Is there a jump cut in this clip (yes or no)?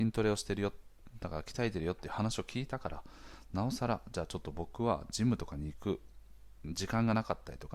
no